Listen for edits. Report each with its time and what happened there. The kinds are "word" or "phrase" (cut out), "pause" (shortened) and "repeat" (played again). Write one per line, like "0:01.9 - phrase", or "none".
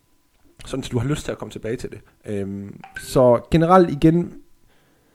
0:02.1 - pause